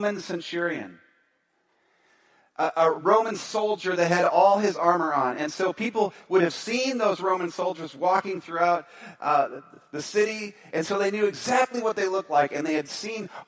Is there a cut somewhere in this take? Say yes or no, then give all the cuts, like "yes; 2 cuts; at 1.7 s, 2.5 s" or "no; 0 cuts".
no; 0 cuts